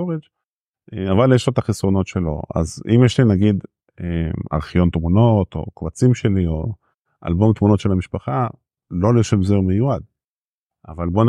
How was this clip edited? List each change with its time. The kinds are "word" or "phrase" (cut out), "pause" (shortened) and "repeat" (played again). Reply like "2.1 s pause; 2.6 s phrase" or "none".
none